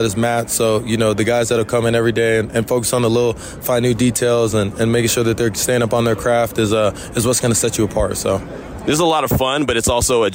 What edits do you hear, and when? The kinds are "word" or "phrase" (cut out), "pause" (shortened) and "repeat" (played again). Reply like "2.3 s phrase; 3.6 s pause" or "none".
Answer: none